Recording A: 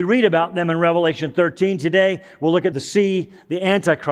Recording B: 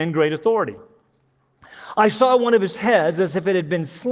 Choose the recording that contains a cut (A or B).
A